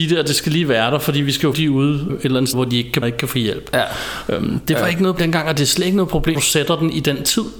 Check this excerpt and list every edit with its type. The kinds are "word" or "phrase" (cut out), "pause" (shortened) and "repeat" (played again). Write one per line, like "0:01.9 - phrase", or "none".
0:01.5 - word
0:02.1 - word
0:02.5 - word
0:03.0 - word
0:05.2 - word
0:06.3 - word